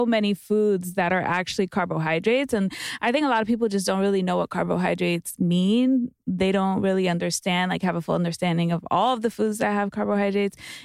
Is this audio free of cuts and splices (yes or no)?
yes